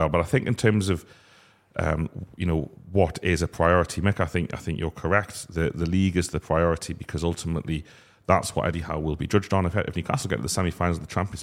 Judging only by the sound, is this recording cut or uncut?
uncut